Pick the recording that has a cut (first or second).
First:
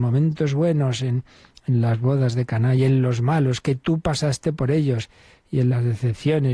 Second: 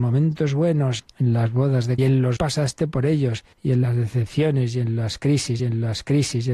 second